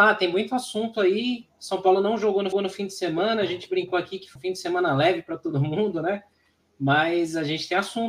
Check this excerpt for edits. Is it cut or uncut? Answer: cut